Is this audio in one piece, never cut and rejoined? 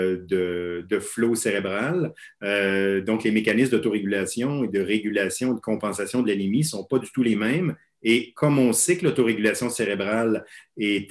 yes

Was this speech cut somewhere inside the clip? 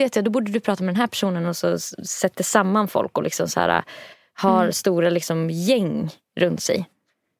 no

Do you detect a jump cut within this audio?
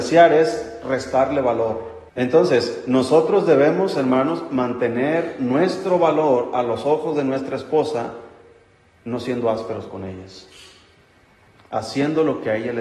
yes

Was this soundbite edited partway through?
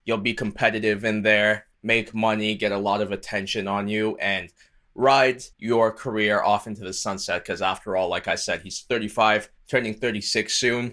yes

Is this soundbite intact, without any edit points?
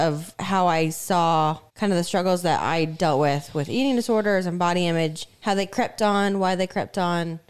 no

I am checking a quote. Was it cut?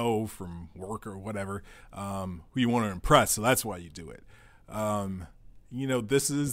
no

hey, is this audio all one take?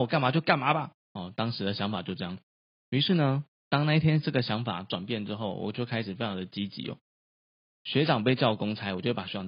no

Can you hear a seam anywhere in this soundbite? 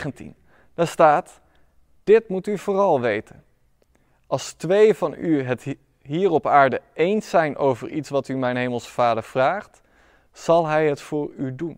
no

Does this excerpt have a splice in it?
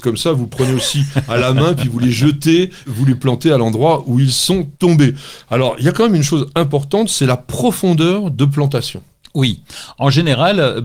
yes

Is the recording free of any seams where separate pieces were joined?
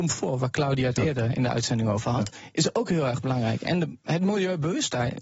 yes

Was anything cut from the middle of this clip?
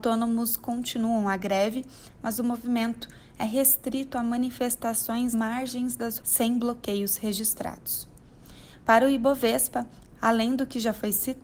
yes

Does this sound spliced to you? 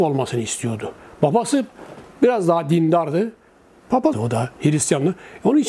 yes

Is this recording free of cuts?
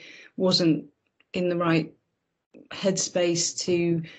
yes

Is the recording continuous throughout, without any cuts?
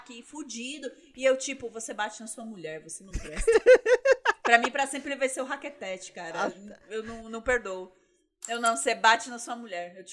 yes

